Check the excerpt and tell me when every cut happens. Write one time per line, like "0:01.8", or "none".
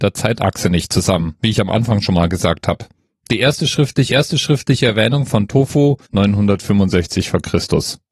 0:01.4
0:04.1
0:06.0